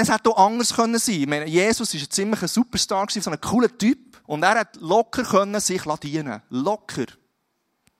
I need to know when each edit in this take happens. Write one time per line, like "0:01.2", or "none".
0:03.2
0:04.2